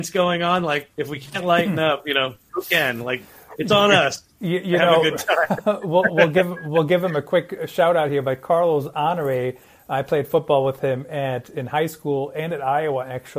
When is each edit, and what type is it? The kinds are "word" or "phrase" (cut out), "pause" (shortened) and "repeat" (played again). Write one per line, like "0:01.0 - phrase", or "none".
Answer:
0:00.9 - pause